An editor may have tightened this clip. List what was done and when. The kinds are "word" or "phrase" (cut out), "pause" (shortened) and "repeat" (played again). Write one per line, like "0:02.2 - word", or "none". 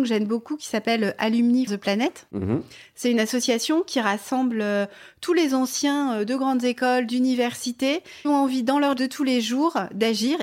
0:01.7 - word
0:08.2 - word
0:09.0 - word